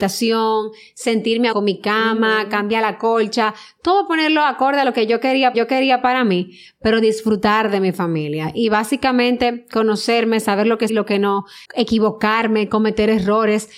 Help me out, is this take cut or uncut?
cut